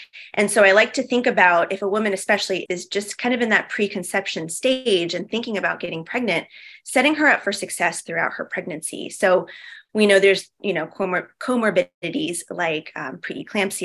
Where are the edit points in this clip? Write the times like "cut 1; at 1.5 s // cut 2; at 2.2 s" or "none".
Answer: cut 1; at 2.7 s